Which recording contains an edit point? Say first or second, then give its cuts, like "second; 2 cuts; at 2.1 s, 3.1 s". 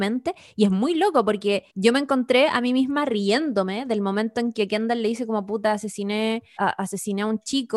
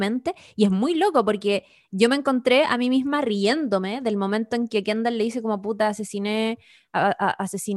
first; 2 cuts; at 1.7 s, 6.6 s